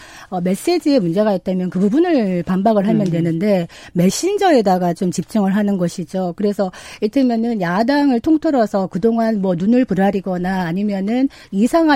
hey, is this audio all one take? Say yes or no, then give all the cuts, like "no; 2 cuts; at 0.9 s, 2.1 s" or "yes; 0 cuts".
yes; 0 cuts